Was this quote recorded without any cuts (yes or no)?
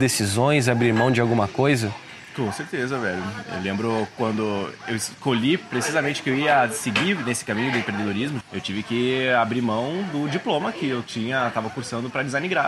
no